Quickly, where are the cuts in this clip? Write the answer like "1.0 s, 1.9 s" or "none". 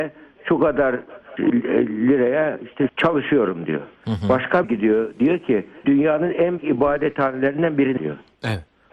1.4 s, 2.9 s, 4.6 s, 5.8 s, 6.6 s, 8.0 s